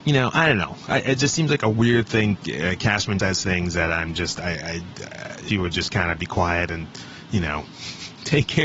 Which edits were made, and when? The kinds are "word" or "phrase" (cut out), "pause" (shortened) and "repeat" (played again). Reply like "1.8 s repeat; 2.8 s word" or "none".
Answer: 2.4 s phrase; 3.2 s word; 5.5 s phrase